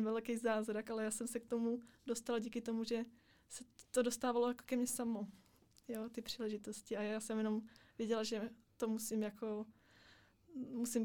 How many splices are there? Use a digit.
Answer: 0